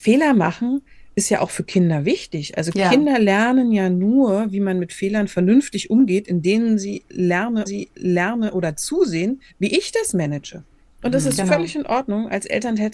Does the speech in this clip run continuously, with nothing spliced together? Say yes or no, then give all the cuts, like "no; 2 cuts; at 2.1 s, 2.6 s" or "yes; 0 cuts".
no; 2 cuts; at 7.7 s, 9.5 s